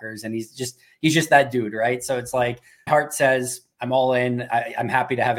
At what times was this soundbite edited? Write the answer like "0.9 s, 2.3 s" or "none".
2.9 s